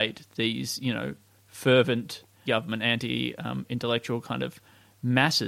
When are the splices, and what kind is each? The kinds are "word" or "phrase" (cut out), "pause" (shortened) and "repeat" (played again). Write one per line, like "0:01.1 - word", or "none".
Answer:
0:02.5 - phrase